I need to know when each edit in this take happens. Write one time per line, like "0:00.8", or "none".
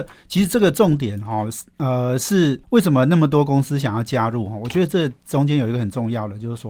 0:02.6